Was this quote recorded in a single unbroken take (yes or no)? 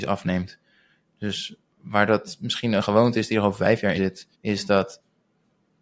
no